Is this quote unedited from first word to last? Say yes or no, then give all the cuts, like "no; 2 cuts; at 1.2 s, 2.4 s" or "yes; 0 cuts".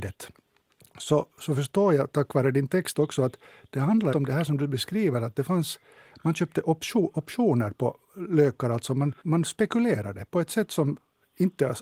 no; 2 cuts; at 4.1 s, 9.2 s